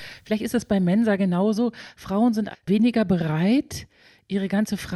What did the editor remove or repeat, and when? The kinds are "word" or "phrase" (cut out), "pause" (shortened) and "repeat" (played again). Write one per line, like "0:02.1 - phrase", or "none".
0:02.5 - word

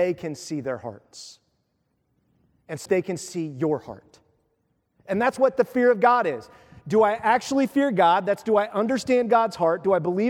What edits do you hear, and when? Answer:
0:02.9 - word

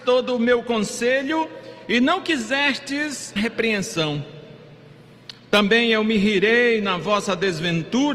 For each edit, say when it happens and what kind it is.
0:03.4 - phrase

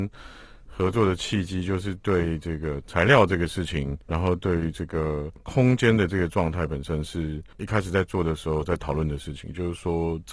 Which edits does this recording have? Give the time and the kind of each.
0:04.0 - pause
0:07.5 - pause

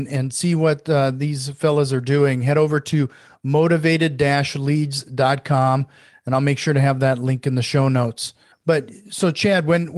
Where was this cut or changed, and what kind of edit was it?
0:08.5 - pause

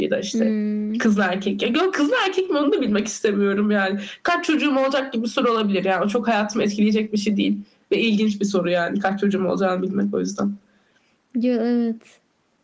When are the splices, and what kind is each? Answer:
none

